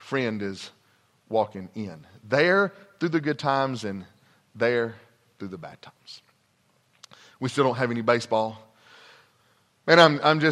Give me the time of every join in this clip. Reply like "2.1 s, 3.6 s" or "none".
none

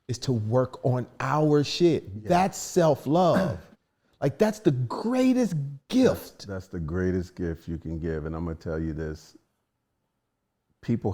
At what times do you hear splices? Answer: 3.7 s

